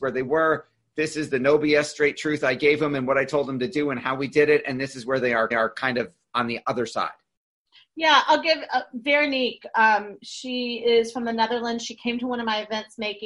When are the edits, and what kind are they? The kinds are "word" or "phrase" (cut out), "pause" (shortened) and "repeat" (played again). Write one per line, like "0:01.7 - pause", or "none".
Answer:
0:05.5 - repeat

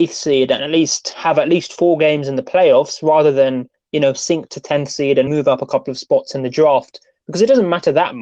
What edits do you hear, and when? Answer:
0:05.3 - word

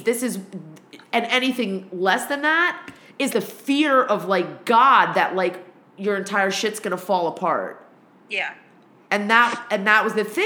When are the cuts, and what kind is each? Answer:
0:03.3 - word

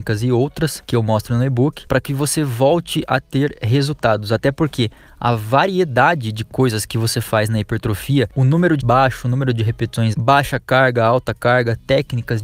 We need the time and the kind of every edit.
0:08.8 - word
0:10.1 - word

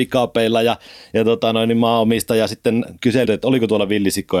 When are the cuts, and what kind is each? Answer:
0:03.3 - phrase

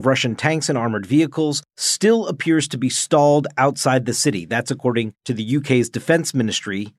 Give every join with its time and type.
none

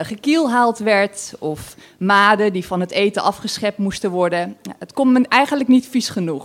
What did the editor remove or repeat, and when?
none

